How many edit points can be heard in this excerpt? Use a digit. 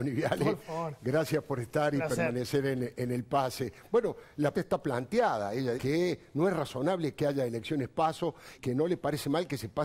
3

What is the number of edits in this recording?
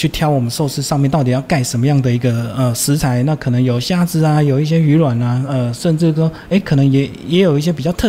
0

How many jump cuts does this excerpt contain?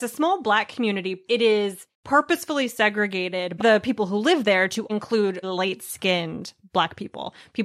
4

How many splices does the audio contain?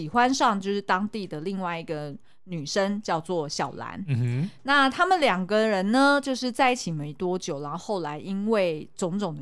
0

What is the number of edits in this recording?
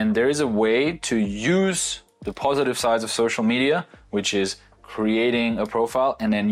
0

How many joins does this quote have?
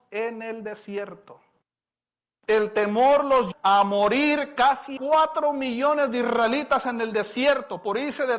3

